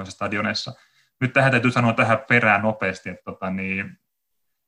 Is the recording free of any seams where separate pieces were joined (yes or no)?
yes